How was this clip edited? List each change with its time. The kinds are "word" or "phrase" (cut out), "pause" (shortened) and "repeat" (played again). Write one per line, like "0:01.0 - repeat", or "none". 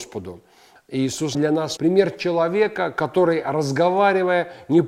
0:01.3 - word
0:01.8 - word